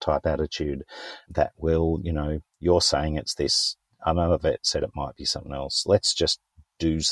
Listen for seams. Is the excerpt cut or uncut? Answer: cut